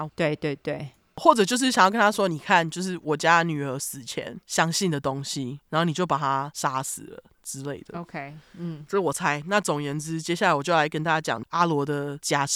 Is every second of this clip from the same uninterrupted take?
yes; 0 cuts

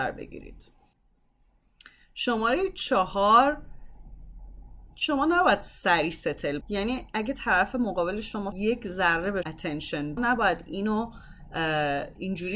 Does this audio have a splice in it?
yes; 4 cuts; at 6.6 s, 8.5 s, 9.4 s, 10.2 s

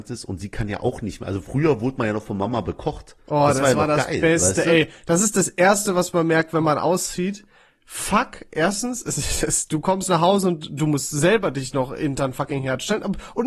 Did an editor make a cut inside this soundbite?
no; 0 cuts

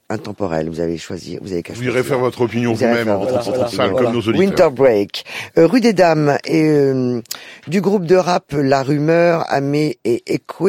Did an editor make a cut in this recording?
yes; 1 cut; at 3.4 s

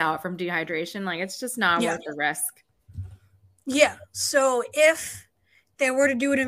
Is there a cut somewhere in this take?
no; 0 cuts

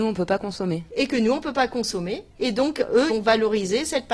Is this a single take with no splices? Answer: no; 2 cuts; at 2.3 s, 3.1 s

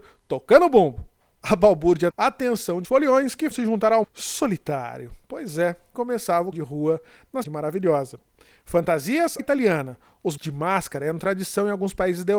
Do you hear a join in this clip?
yes; 9 cuts; at 2.1 s, 2.8 s, 3.5 s, 4.0 s, 5.9 s, 6.5 s, 7.4 s, 9.4 s, 10.4 s

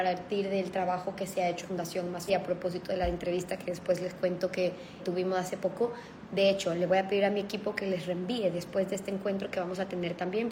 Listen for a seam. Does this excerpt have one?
yes; 3 cuts; at 1.6 s, 2.3 s, 5.0 s

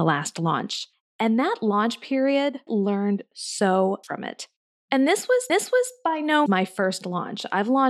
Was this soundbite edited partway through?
yes; 5 cuts; at 0.9 s, 2.7 s, 4.0 s, 5.5 s, 6.5 s

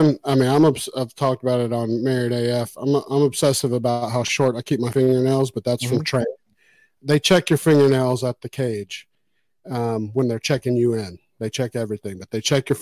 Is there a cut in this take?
no; 0 cuts

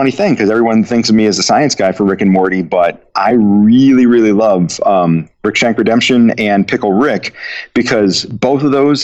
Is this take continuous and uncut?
yes; 0 cuts

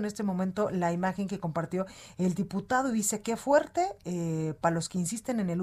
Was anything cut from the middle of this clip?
no; 0 cuts

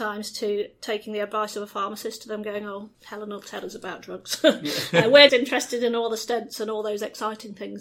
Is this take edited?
yes; 2 cuts; at 2.9 s, 5.3 s

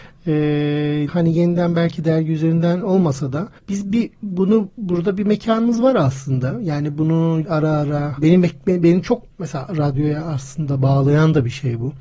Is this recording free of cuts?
no; 5 cuts; at 1.1 s, 3.6 s, 7.4 s, 8.2 s, 9.3 s

